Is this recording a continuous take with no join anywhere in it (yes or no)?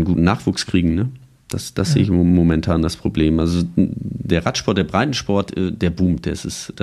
yes